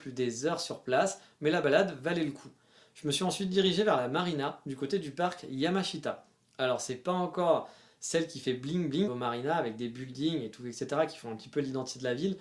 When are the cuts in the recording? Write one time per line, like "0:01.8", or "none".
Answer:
0:09.1